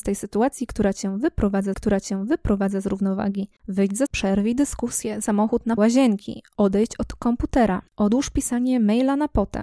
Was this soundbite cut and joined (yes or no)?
yes